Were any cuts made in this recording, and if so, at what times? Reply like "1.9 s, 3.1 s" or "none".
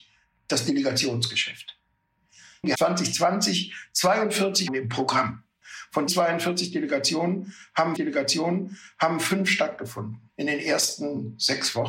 2.7 s, 4.7 s, 6.1 s, 7.9 s, 10.3 s